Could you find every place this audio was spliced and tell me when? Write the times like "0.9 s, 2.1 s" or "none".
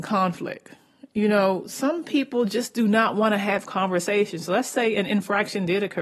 none